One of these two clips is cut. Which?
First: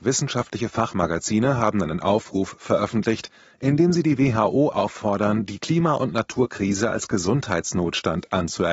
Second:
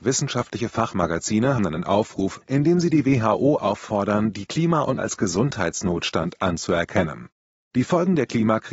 second; 3 cuts; at 1.6 s, 2.4 s, 5.0 s

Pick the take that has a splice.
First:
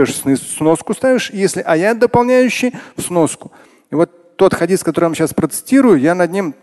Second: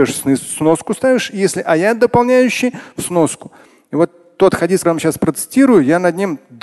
second; 1 cut; at 4.8 s

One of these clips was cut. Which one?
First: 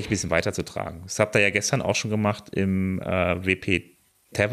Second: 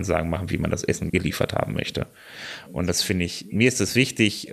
second; 1 cut; at 1.1 s

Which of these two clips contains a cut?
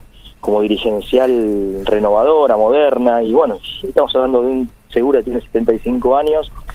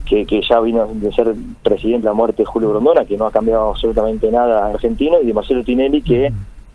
second; 3 cuts; at 2.0 s, 3.2 s, 4.7 s

